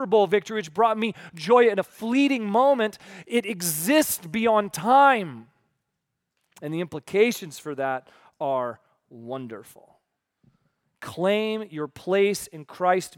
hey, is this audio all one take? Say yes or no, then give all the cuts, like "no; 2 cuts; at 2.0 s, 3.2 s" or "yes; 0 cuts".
yes; 0 cuts